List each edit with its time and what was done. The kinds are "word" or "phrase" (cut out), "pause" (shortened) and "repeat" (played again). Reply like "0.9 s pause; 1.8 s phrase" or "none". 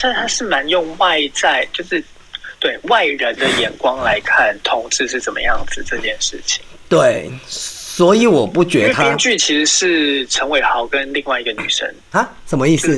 12.0 s pause